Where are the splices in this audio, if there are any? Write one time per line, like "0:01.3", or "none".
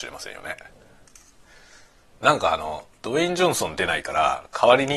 0:02.9